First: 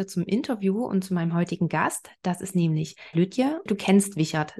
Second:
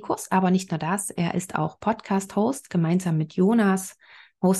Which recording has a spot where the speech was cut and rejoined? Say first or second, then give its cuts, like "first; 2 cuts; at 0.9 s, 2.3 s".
first; 2 cuts; at 3.1 s, 3.7 s